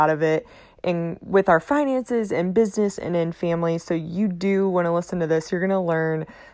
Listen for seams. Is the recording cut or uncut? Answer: uncut